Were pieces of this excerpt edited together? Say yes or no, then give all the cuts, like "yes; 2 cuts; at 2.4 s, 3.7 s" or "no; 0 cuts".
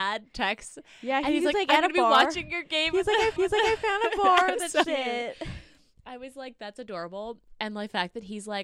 yes; 2 cuts; at 3.4 s, 4.8 s